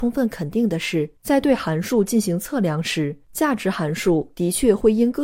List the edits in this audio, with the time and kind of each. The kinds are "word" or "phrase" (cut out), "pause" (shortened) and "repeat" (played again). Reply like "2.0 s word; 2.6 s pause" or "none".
1.2 s pause; 3.2 s pause